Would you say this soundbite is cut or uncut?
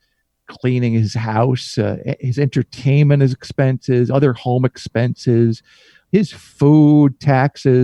uncut